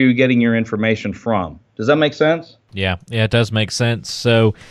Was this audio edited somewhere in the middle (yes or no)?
no